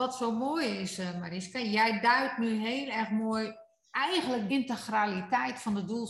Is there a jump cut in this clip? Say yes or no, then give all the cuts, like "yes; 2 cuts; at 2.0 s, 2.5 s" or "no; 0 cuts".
yes; 1 cut; at 4.5 s